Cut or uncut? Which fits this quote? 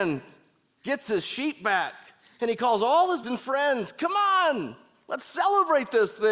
cut